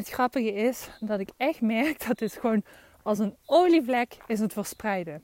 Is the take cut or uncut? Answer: uncut